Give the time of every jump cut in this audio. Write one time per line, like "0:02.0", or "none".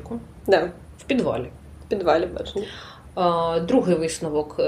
0:00.9